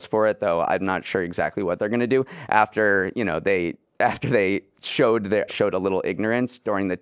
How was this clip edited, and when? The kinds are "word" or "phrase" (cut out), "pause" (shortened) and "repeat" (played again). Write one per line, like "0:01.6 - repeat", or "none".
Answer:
0:05.5 - word